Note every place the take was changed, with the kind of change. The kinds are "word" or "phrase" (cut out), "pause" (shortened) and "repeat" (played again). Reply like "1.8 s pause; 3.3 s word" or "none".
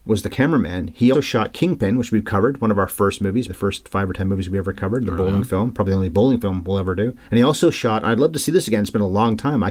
1.1 s word; 3.5 s word; 7.2 s pause